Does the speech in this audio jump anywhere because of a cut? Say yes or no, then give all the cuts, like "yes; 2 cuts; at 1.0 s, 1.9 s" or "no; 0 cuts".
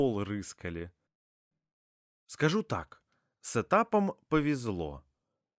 no; 0 cuts